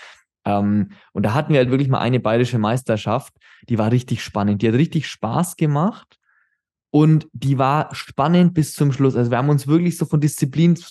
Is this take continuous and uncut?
yes; 0 cuts

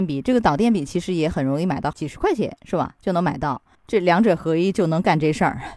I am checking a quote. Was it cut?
yes; 2 cuts; at 1.9 s, 3.7 s

